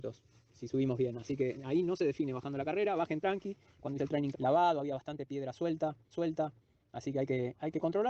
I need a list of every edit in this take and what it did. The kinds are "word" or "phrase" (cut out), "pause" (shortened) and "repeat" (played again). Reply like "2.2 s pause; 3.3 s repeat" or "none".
4.0 s word; 4.3 s phrase; 6.1 s repeat